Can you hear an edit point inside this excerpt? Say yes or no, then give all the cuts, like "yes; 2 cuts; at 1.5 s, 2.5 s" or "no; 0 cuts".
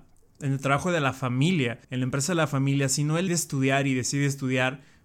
yes; 2 cuts; at 1.8 s, 3.3 s